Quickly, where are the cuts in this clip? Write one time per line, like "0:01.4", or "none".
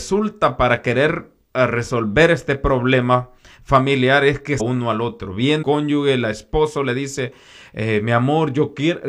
0:04.6
0:05.6